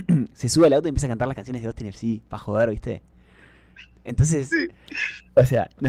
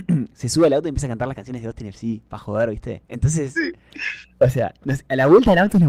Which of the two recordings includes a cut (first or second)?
second